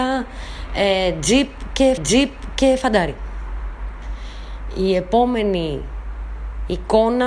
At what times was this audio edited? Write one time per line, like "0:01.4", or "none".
0:02.0